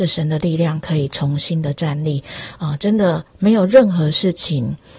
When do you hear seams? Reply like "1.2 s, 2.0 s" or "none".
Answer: 3.3 s